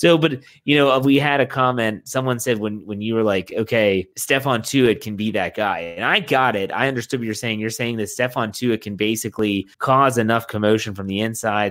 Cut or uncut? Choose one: cut